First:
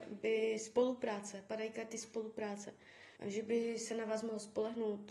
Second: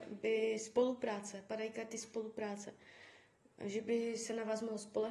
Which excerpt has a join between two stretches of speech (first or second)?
first